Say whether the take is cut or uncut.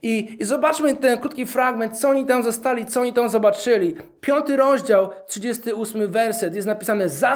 uncut